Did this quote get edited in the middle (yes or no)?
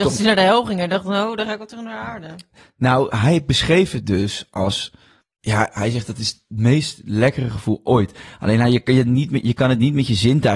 no